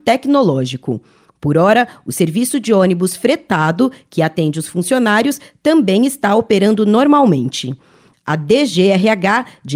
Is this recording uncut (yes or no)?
yes